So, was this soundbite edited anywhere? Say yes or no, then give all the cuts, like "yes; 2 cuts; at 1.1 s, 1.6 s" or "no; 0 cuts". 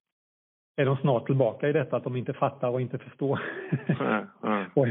no; 0 cuts